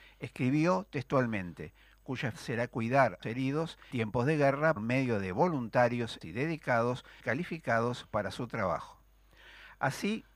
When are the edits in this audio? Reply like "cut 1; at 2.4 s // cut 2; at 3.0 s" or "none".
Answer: cut 1; at 2.3 s // cut 2; at 3.2 s // cut 3; at 3.9 s // cut 4; at 4.8 s // cut 5; at 6.2 s // cut 6; at 7.2 s